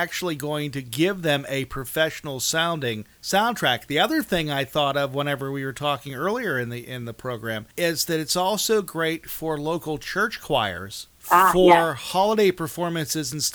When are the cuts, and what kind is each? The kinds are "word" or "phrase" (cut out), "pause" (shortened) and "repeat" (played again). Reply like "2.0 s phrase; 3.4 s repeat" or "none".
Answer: 3.1 s pause; 7.7 s pause; 11.1 s pause